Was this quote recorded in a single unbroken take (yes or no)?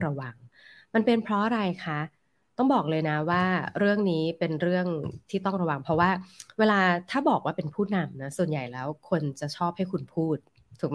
yes